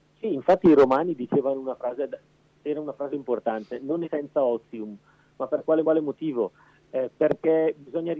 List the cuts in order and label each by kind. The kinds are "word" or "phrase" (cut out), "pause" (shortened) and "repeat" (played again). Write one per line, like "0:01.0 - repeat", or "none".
0:03.1 - word
0:04.0 - phrase
0:05.8 - repeat

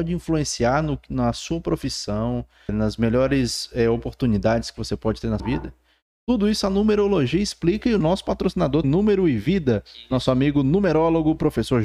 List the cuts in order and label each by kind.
0:02.7 - word
0:05.4 - word
0:08.8 - word

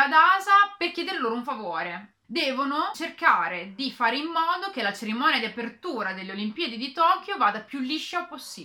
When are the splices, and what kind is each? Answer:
0:02.2 - pause

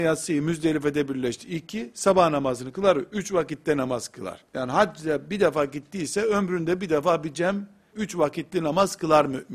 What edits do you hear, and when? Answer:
0:04.5 - pause
0:07.9 - word

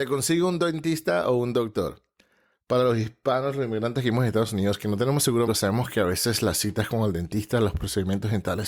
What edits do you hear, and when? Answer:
0:05.5 - word

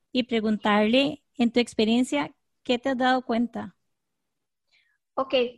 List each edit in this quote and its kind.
none

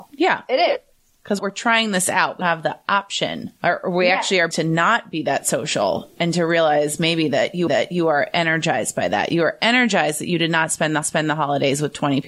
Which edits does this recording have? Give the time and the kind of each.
0:01.4 - phrase
0:02.4 - word
0:03.6 - pause
0:04.5 - phrase
0:07.7 - repeat
0:11.0 - repeat

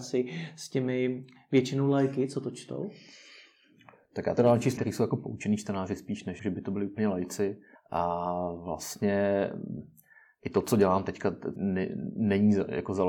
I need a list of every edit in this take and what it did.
0:04.8 - word
0:06.4 - word
0:07.7 - pause
0:11.6 - phrase

